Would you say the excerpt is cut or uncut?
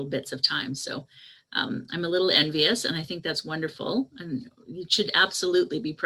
uncut